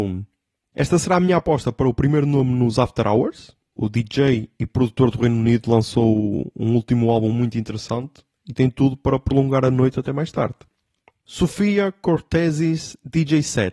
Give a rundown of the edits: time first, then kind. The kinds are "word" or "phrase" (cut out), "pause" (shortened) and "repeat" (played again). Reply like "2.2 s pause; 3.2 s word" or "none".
none